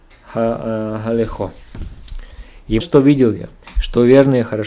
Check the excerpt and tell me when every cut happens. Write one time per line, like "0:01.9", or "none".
0:02.8